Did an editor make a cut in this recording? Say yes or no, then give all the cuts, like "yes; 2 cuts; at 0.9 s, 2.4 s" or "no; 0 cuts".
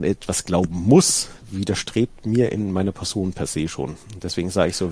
no; 0 cuts